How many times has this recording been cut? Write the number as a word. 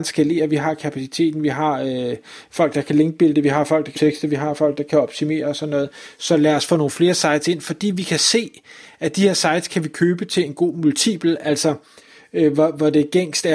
one